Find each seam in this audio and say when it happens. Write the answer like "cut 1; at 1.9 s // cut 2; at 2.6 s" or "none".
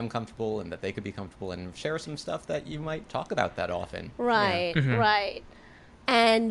cut 1; at 3.0 s